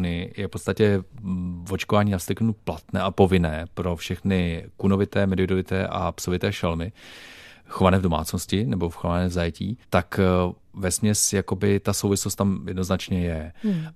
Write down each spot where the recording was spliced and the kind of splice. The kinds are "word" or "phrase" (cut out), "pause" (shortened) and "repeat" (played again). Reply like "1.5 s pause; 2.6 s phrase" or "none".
9.8 s pause